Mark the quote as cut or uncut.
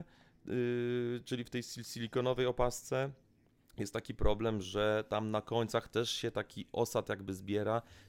uncut